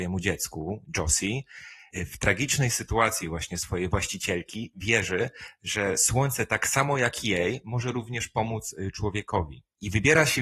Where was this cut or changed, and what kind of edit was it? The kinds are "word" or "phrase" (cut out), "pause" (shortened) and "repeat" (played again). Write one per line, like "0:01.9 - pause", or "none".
none